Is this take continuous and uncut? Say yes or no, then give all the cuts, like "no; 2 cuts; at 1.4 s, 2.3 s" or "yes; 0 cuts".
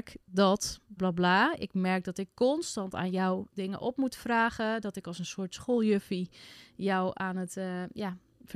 no; 1 cut; at 1.0 s